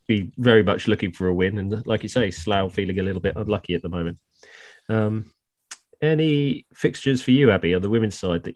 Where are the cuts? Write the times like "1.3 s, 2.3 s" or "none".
none